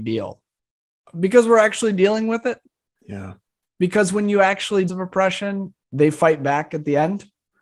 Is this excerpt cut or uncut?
cut